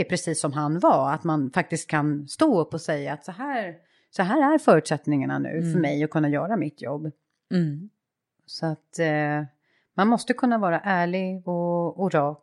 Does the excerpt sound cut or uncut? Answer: uncut